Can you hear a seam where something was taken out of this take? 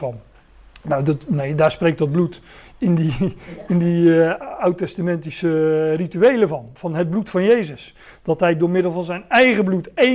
no; 0 cuts

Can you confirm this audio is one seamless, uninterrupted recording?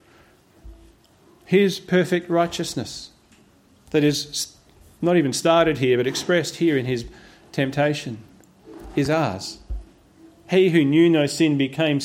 yes; 0 cuts

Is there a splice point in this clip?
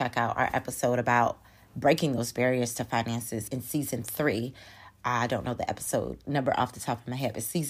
yes; 1 cut; at 3.5 s

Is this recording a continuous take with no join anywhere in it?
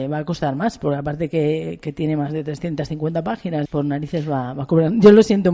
no; 1 cut; at 3.7 s

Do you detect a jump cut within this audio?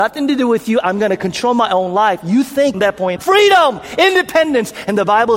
yes; 2 cuts; at 2.7 s, 3.2 s

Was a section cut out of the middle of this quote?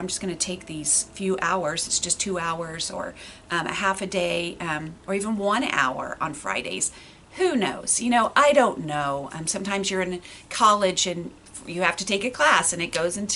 no; 0 cuts

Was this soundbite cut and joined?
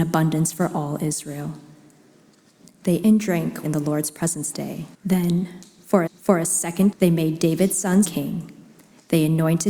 yes; 7 cuts; at 3.0 s, 3.6 s, 4.5 s, 4.9 s, 6.1 s, 6.9 s, 8.0 s

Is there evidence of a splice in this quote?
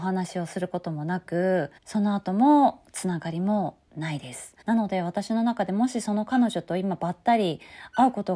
yes; 2 cuts; at 1.8 s, 4.6 s

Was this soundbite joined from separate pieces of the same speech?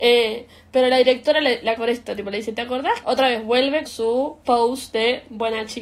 yes; 4 cuts; at 1.8 s, 3.0 s, 3.9 s, 4.4 s

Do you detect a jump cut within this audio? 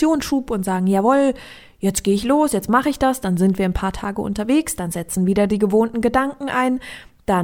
no; 0 cuts

